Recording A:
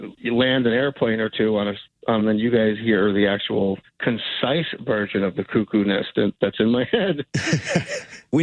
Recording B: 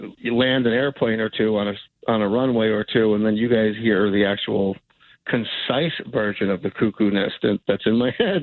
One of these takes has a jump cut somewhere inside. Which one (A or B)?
A